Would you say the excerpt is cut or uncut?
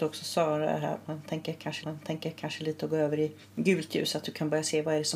cut